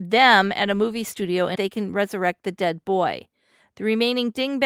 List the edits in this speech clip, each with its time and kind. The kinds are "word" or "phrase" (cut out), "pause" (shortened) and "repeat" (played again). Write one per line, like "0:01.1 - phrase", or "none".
0:01.5 - phrase